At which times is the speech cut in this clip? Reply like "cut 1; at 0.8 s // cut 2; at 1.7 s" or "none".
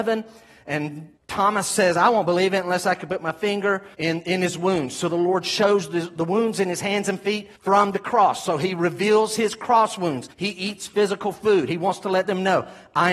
cut 1; at 1.2 s // cut 2; at 3.9 s // cut 3; at 7.6 s // cut 4; at 10.3 s